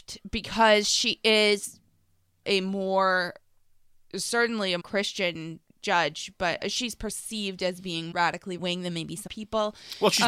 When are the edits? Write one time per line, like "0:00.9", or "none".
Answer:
0:02.4
0:04.8
0:06.6
0:08.1
0:08.6
0:09.3

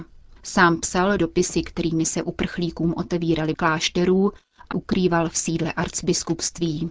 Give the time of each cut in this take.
0:01.2
0:03.5
0:04.7

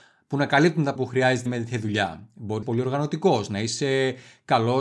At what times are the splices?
0:01.0
0:01.5
0:02.6

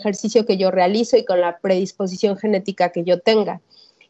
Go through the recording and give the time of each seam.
none

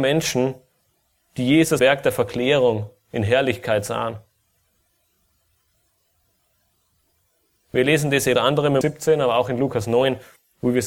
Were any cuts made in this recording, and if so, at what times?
0:01.8
0:08.3
0:08.8

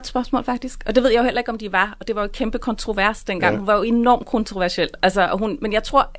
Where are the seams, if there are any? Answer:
none

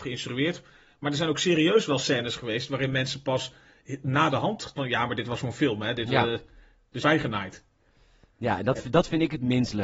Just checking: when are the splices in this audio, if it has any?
0:04.8
0:07.0

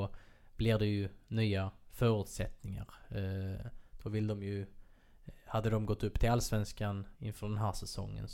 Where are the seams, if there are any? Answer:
0:07.1

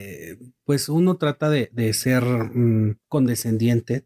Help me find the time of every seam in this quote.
0:03.0

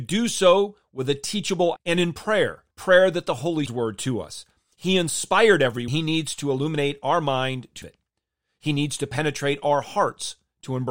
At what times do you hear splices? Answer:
0:01.8
0:02.7
0:03.7
0:05.9
0:07.8

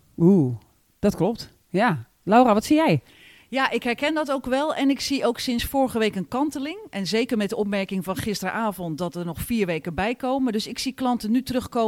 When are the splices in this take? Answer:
none

